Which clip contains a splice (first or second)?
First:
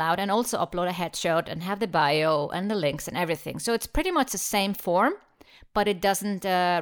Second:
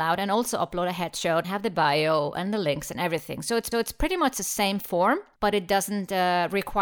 second